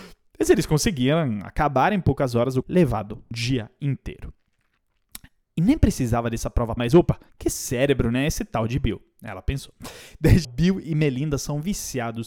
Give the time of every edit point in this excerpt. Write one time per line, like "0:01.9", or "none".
0:02.6
0:03.3
0:06.8
0:07.3
0:10.4